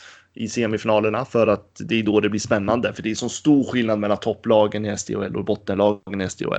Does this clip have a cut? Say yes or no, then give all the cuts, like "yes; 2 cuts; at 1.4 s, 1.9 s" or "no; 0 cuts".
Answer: no; 0 cuts